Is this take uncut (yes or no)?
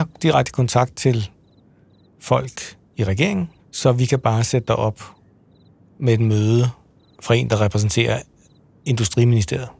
no